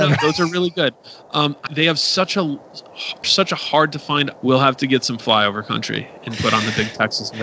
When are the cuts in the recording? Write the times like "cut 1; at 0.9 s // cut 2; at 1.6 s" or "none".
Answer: cut 1; at 1.7 s // cut 2; at 3.2 s // cut 3; at 4.3 s